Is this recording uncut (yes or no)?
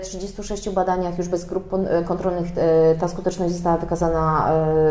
yes